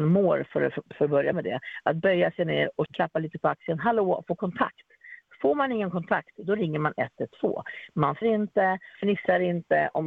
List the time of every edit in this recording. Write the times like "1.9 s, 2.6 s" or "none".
1.3 s, 2.9 s, 8.2 s, 8.9 s